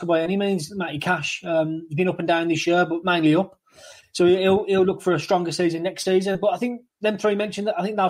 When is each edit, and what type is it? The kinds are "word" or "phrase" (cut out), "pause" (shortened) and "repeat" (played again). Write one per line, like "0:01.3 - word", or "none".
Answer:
none